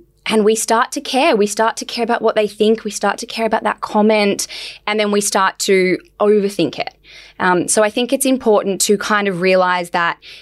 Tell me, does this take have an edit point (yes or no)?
no